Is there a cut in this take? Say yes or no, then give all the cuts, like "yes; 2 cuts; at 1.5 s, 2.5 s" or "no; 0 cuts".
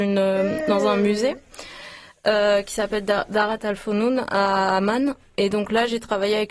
no; 0 cuts